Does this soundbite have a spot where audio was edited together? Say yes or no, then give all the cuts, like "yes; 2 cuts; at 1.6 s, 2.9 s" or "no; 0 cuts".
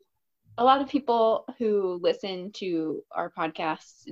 no; 0 cuts